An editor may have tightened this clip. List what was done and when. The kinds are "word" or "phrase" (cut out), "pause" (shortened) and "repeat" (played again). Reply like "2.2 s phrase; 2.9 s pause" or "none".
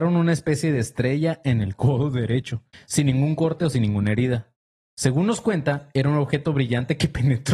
2.7 s pause